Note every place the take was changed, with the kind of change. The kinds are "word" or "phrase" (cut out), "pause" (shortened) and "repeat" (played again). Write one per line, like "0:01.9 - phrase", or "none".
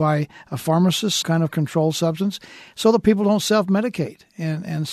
0:01.2 - word

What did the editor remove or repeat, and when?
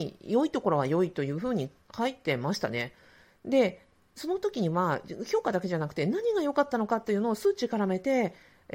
none

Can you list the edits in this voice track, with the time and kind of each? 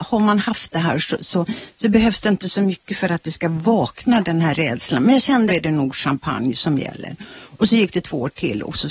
0:05.5 - phrase

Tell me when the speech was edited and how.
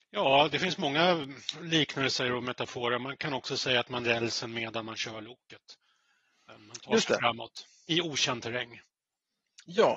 0:03.2 - word
0:04.0 - word
0:07.9 - word

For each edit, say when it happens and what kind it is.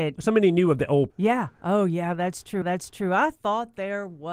0:01.1 - word
0:02.6 - repeat

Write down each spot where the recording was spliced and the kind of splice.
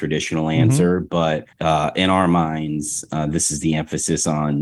0:01.5 - pause

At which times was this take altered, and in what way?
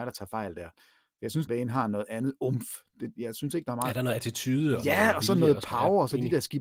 0:01.5 - word

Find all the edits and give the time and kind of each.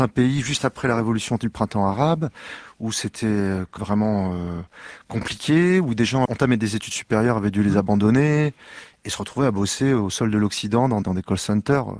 0:03.8 - word
0:06.3 - word
0:11.0 - word

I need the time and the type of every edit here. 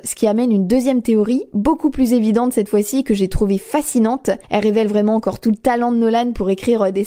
0:04.4 - pause

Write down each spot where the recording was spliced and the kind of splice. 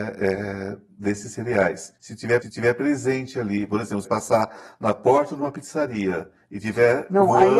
0:02.0 - pause
0:02.4 - repeat
0:04.0 - word

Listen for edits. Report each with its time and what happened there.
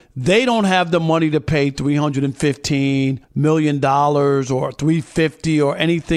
0:03.2 - pause

